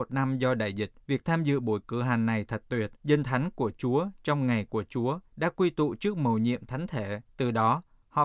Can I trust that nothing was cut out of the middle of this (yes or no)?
no